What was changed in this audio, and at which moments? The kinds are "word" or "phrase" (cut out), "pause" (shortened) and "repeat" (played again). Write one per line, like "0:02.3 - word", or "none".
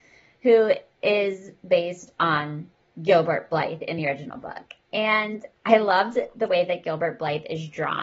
none